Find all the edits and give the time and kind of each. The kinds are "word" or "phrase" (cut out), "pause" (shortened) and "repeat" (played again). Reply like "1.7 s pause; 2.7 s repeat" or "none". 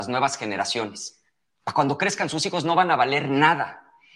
none